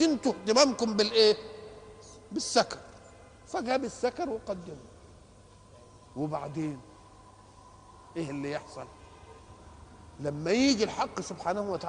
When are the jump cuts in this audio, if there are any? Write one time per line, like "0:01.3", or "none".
0:06.0